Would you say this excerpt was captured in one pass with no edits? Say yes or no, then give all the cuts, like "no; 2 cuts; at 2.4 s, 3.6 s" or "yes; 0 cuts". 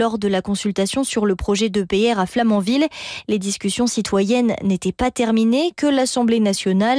yes; 0 cuts